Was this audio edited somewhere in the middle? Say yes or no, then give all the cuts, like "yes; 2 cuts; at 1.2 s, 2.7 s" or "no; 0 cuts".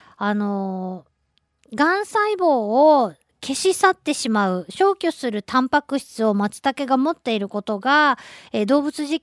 no; 0 cuts